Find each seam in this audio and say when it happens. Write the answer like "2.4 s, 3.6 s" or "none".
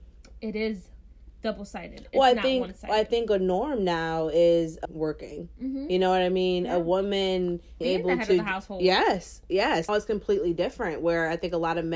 4.8 s, 7.8 s, 9.9 s